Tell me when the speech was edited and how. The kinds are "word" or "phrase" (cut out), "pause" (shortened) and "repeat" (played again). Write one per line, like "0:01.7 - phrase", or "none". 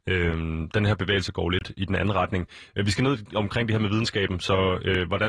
none